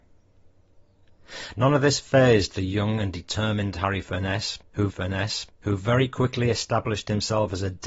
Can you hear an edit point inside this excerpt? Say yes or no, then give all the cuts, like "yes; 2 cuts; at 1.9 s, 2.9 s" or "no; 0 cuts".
yes; 1 cut; at 4.9 s